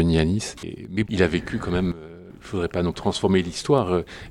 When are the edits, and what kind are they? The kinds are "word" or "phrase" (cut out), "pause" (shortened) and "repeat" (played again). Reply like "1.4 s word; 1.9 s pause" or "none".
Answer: 1.0 s word; 2.9 s word